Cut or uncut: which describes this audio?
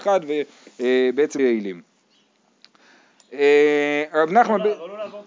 cut